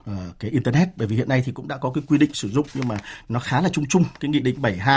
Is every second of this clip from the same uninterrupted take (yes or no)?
yes